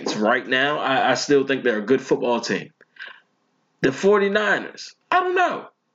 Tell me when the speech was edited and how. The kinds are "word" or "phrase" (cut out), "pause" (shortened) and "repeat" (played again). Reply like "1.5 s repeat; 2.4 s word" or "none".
3.6 s pause; 5.0 s pause

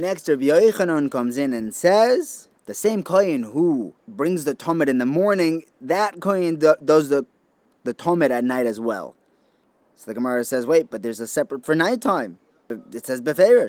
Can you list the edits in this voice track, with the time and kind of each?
2.5 s pause; 4.0 s pause; 11.6 s word

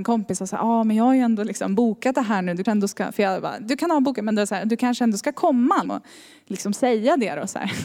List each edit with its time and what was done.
2.7 s word; 5.9 s word

